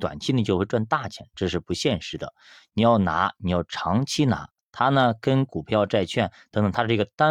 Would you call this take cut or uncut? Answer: uncut